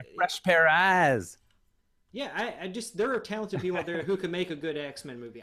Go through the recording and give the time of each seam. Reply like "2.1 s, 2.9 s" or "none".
none